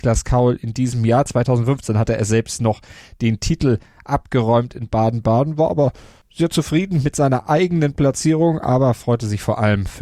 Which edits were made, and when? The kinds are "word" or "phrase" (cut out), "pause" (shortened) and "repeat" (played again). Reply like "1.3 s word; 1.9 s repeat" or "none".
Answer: none